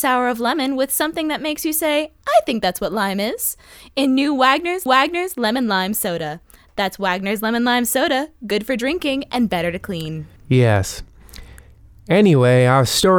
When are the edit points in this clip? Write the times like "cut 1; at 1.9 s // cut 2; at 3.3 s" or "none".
cut 1; at 4.9 s // cut 2; at 10.4 s